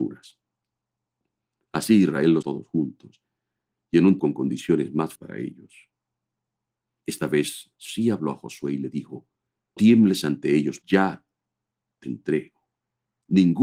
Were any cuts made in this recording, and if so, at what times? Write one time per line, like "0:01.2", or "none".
0:02.4
0:04.2
0:05.2
0:07.8
0:09.8
0:10.8
0:12.0